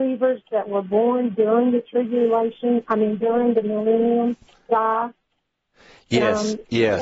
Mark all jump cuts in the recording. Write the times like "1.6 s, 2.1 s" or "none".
none